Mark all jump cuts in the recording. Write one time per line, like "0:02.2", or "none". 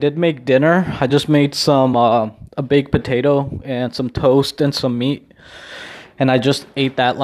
none